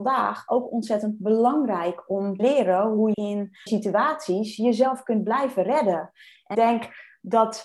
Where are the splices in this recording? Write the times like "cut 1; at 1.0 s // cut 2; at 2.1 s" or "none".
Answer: cut 1; at 2.4 s // cut 2; at 3.1 s // cut 3; at 3.7 s // cut 4; at 6.5 s